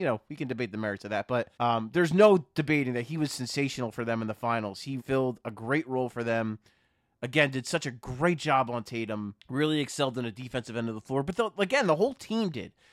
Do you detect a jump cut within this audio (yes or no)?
yes